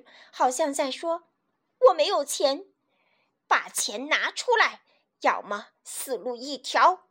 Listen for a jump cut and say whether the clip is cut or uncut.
uncut